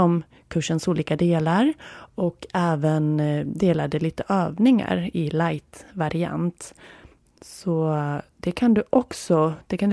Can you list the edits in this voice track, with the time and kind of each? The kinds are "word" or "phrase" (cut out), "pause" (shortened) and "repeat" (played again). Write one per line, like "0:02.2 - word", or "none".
none